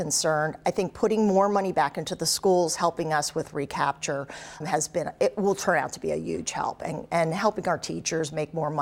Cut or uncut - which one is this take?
cut